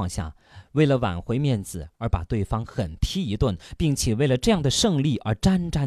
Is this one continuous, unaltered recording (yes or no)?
no